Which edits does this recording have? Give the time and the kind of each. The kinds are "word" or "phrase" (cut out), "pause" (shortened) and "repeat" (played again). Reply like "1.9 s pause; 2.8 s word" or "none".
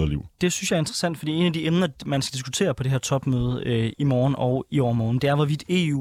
3.9 s word